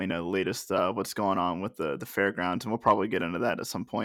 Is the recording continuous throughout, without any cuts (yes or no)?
yes